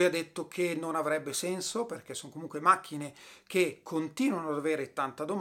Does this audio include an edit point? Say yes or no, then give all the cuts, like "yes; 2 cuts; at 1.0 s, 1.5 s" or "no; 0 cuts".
no; 0 cuts